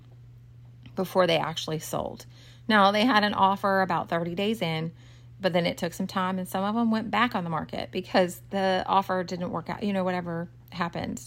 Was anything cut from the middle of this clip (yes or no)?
no